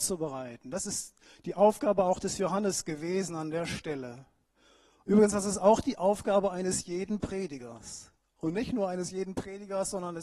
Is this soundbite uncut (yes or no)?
yes